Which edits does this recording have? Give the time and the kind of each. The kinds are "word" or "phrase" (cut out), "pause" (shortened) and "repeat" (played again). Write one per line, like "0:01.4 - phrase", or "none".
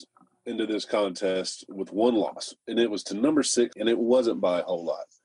0:03.7 - word